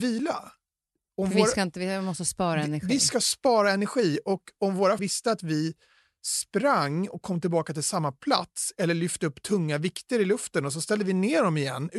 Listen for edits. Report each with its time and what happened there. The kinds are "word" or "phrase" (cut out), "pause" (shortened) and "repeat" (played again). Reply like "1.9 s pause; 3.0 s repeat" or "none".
5.0 s word